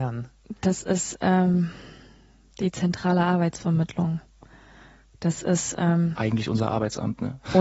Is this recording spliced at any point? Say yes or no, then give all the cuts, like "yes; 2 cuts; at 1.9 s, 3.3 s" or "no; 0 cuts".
no; 0 cuts